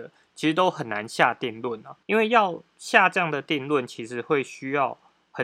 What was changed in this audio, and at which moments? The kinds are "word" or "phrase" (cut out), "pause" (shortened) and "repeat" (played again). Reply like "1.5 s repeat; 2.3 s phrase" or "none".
2.0 s pause